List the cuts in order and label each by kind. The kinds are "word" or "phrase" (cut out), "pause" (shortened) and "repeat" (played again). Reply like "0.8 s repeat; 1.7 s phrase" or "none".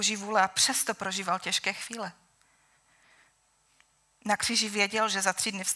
none